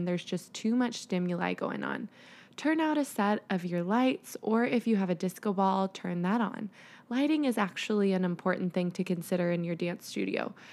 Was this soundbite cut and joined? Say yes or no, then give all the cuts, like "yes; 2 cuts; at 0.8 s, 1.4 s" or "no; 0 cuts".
no; 0 cuts